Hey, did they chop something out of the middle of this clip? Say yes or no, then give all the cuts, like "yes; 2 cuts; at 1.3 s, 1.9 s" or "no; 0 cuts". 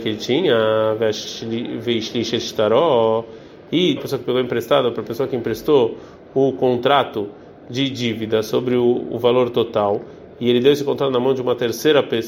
yes; 1 cut; at 4.0 s